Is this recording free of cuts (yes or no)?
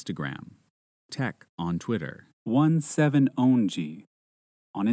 no